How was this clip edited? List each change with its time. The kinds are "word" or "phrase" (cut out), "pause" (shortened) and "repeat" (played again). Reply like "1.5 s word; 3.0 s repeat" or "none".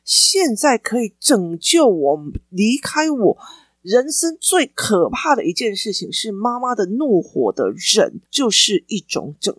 8.2 s pause

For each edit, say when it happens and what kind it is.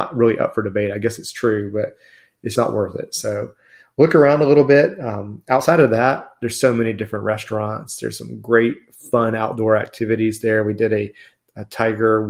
2.6 s word

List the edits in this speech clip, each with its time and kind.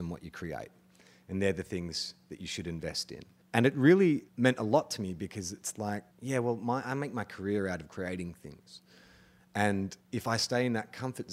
3.4 s pause; 4.3 s pause; 6.1 s pause; 10.0 s pause

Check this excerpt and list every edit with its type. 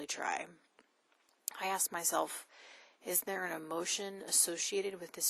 none

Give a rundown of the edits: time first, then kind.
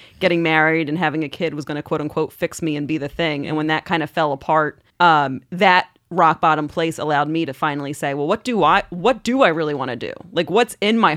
4.9 s pause

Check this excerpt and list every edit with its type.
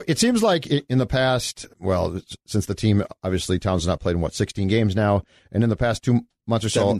none

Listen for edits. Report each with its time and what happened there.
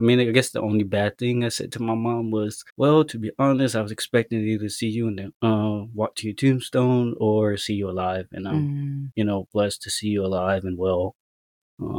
2.7 s pause

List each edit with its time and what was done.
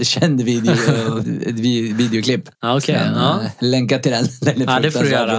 1.2 s word; 2.5 s pause

